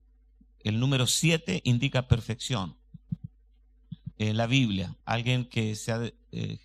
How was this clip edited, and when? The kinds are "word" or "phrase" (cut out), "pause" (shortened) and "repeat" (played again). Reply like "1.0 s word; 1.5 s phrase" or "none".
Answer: 4.1 s pause; 5.0 s pause